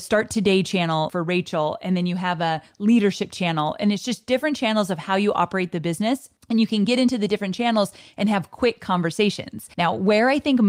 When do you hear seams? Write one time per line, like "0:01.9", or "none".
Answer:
0:01.1
0:06.4
0:09.7